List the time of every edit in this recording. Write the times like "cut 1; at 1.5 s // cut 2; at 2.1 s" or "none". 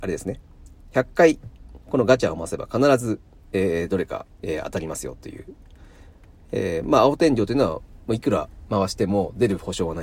cut 1; at 4.3 s